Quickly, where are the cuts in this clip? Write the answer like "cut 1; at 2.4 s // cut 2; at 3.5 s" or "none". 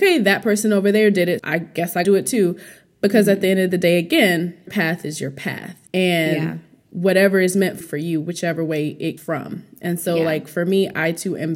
cut 1; at 1.4 s // cut 2; at 2.0 s // cut 3; at 4.7 s // cut 4; at 5.9 s // cut 5; at 7.8 s // cut 6; at 9.2 s